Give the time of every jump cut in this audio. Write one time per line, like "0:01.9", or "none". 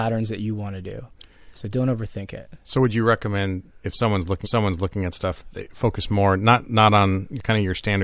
0:04.4